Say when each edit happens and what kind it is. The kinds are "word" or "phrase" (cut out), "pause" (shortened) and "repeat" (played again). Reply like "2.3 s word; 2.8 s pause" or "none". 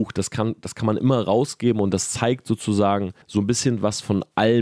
3.2 s pause